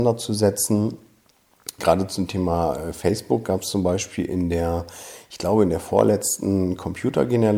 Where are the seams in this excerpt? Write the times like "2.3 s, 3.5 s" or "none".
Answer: 1.8 s